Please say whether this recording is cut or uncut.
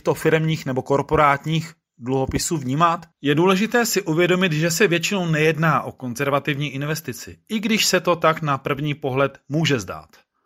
cut